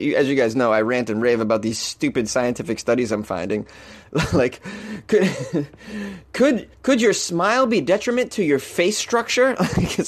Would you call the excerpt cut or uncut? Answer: cut